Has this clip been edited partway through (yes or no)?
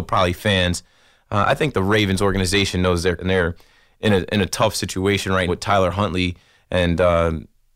yes